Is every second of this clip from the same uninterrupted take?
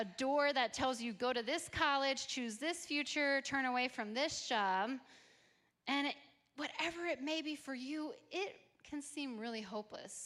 yes; 0 cuts

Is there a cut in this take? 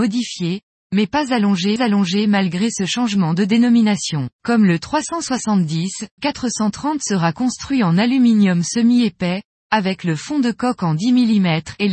yes; 3 cuts; at 1.8 s, 4.3 s, 6.2 s

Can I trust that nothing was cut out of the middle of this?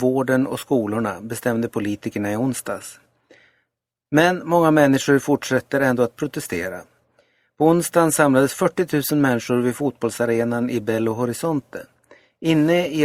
yes; 0 cuts

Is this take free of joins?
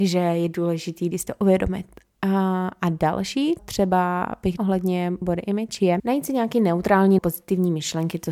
no; 6 cuts; at 1.1 s, 3.6 s, 4.6 s, 5.2 s, 6.0 s, 7.2 s

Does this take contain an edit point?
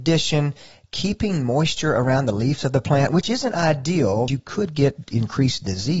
yes; 1 cut; at 4.3 s

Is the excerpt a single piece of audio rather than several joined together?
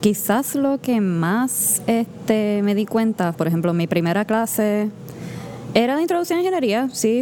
no; 1 cut; at 3.3 s

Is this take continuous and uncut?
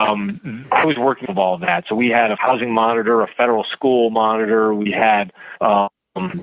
no; 2 cuts; at 1.3 s, 2.4 s

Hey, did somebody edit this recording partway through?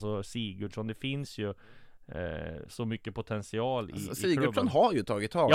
no; 0 cuts

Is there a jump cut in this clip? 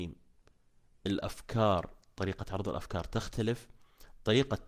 no; 0 cuts

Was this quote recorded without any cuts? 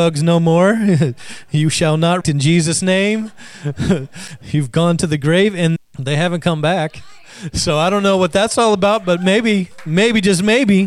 no; 2 cuts; at 2.2 s, 5.8 s

